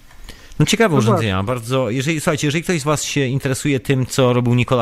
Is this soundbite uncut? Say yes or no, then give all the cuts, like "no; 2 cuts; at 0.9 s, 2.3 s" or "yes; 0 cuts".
yes; 0 cuts